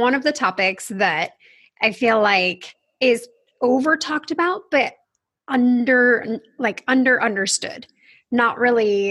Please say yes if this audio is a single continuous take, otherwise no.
yes